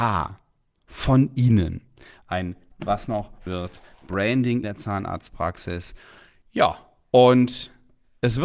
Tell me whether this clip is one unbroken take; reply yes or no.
no